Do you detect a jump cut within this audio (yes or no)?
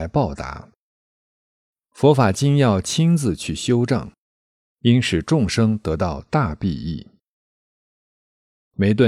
no